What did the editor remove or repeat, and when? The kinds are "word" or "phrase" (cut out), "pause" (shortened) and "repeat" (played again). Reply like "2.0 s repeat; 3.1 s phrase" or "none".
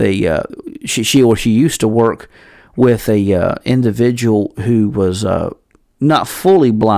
none